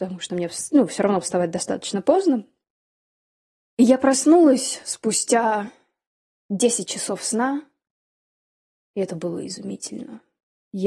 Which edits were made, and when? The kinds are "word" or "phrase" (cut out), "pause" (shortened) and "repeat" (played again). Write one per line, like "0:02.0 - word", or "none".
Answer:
none